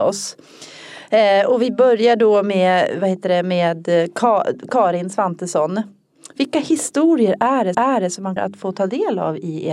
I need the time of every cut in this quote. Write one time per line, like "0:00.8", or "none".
0:07.7
0:08.4